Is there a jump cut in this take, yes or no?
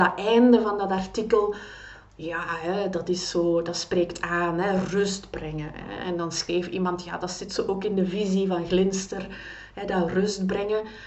no